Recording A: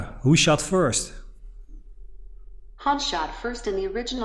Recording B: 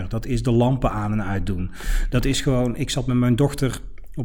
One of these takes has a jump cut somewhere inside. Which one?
A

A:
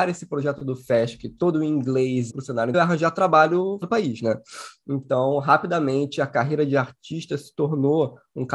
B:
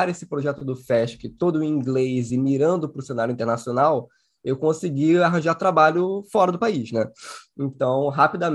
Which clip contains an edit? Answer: A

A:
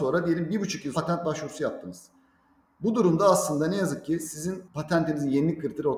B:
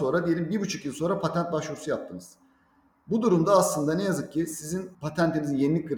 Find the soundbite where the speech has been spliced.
A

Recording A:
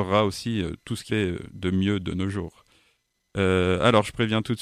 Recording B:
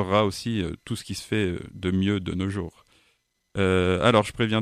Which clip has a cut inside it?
A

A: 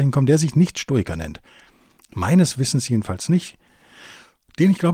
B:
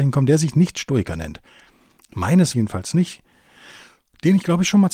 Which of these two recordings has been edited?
B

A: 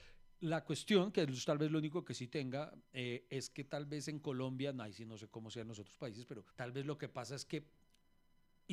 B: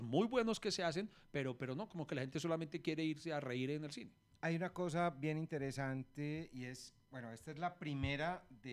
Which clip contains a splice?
A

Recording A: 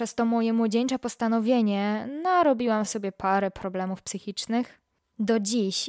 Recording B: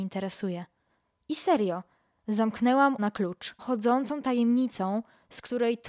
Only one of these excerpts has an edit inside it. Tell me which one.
B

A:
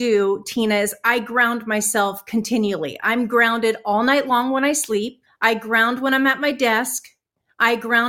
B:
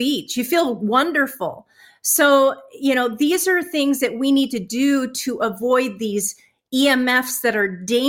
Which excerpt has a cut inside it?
A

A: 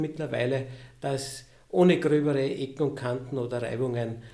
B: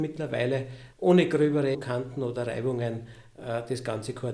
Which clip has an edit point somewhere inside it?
B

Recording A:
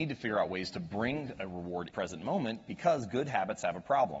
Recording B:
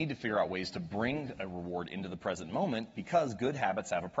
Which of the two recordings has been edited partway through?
A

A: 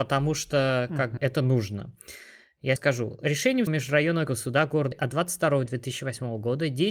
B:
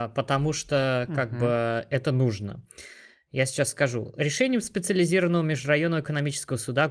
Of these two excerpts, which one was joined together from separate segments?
A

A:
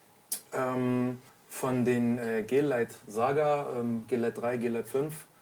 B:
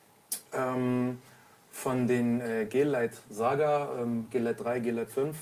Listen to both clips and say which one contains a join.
A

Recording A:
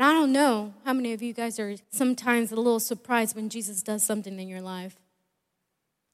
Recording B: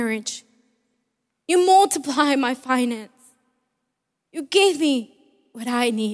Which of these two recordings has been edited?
A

